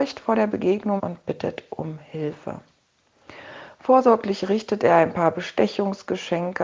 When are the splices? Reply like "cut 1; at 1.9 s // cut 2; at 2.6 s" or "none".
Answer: cut 1; at 1.0 s